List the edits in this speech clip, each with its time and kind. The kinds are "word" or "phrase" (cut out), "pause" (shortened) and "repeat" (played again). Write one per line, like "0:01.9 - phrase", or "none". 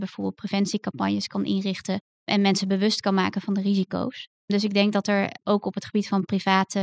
none